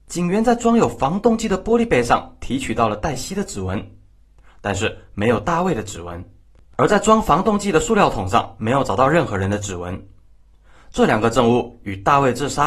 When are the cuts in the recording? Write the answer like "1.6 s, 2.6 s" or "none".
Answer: 6.4 s